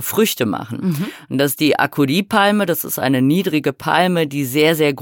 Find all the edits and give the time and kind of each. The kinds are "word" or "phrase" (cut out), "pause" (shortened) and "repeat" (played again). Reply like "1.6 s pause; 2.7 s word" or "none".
none